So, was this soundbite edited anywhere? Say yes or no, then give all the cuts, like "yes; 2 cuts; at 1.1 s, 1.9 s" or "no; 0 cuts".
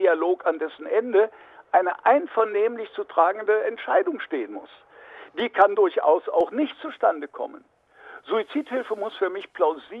no; 0 cuts